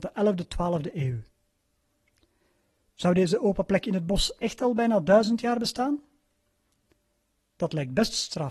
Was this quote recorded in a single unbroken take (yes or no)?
yes